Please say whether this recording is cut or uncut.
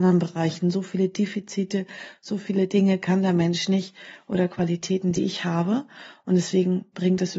uncut